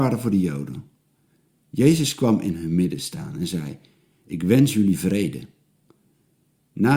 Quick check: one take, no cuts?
yes; 0 cuts

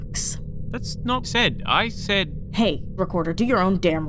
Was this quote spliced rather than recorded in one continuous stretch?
yes; 2 cuts; at 1.2 s, 3.0 s

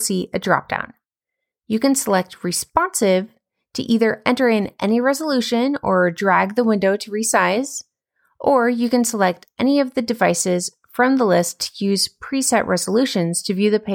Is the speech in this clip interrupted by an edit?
no; 0 cuts

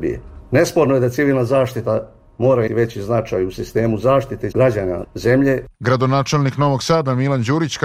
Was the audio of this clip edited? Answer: yes; 3 cuts; at 2.7 s, 4.5 s, 5.0 s

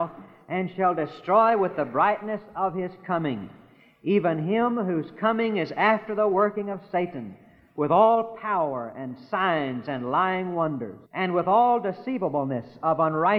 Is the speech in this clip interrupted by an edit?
yes; 1 cut; at 11.1 s

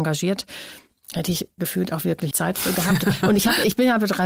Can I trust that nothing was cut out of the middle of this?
no; 1 cut; at 2.3 s

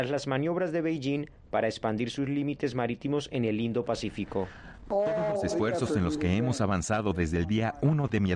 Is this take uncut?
yes; 0 cuts

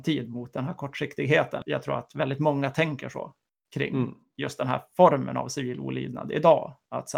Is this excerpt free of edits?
yes; 0 cuts

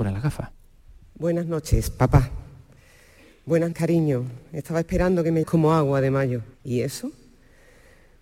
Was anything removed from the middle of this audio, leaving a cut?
yes; 3 cuts; at 3.7 s, 5.4 s, 6.5 s

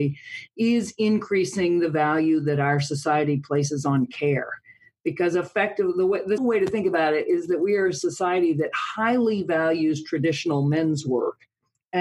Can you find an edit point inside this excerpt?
yes; 1 cut; at 6.4 s

